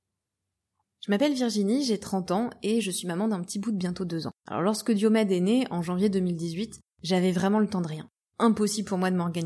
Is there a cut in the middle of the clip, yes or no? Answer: yes